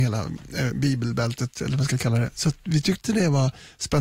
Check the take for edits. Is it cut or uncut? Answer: uncut